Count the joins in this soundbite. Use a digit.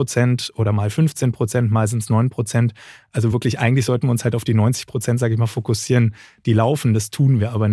0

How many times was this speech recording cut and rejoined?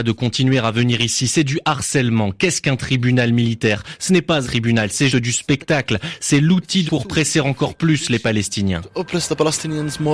3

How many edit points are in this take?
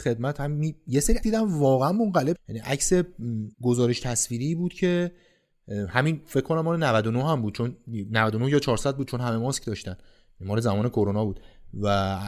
3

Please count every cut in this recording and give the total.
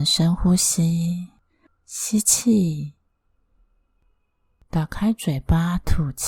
0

